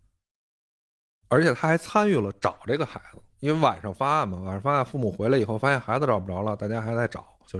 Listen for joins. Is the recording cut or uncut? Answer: uncut